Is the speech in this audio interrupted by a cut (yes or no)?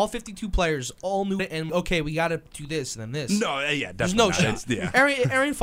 yes